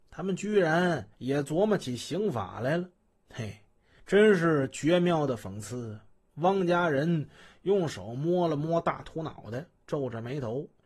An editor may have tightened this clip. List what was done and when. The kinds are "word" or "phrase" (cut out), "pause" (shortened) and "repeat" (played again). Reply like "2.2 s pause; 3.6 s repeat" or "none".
1.1 s pause